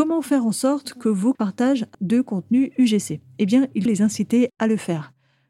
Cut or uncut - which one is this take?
cut